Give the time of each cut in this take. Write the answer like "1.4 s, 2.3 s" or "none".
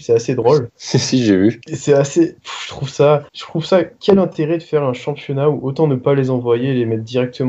none

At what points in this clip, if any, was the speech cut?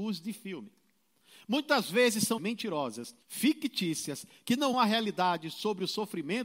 2.4 s, 3.2 s, 4.7 s

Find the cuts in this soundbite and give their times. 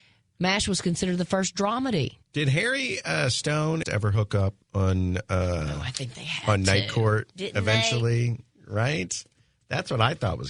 2.2 s, 3.8 s, 4.6 s

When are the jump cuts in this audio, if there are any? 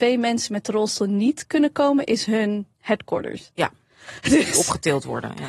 none

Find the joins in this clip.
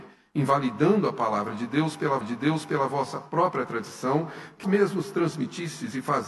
2.2 s, 4.6 s

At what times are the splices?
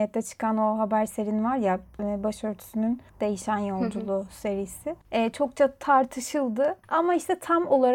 3.1 s, 5.0 s

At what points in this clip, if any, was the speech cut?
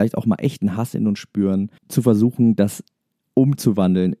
1.8 s

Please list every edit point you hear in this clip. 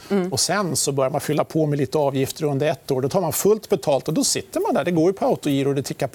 none

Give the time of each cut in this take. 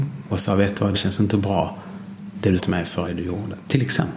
0.9 s, 2.6 s, 3.0 s

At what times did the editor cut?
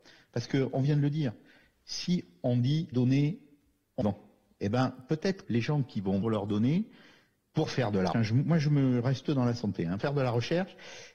2.9 s, 4.0 s, 5.4 s, 6.2 s, 8.1 s, 9.2 s, 10.0 s

